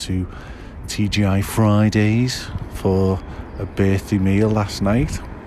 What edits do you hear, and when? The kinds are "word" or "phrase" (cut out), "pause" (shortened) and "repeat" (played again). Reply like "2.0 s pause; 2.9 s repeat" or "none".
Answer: none